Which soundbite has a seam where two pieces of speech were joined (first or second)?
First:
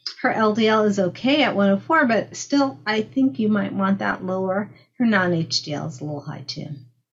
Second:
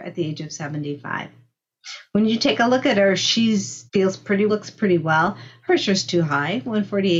second